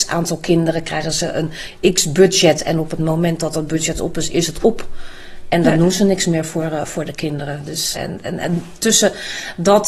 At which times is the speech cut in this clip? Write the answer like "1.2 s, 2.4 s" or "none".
7.9 s

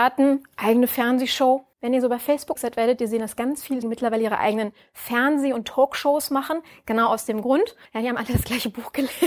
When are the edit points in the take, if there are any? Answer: 1.7 s, 2.6 s, 3.8 s, 7.9 s

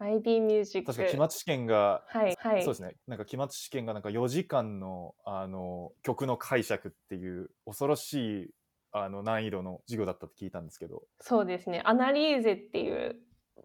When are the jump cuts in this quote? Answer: 2.3 s, 11.1 s

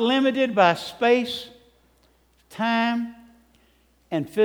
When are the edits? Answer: none

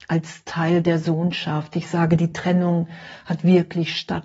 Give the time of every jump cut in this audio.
none

